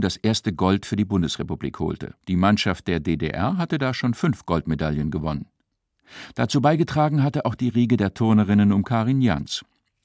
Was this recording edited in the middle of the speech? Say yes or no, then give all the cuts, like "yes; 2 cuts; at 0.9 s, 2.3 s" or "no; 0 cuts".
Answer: yes; 1 cut; at 2.2 s